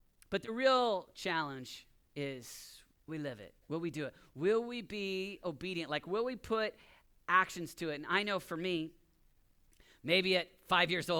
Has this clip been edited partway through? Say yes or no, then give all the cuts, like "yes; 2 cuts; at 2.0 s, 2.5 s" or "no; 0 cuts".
yes; 2 cuts; at 3.1 s, 3.6 s